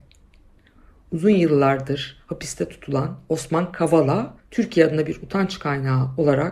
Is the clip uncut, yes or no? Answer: no